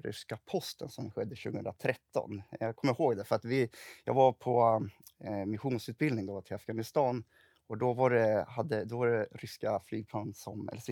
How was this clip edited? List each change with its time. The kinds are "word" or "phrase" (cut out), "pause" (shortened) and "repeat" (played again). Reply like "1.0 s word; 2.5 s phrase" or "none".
none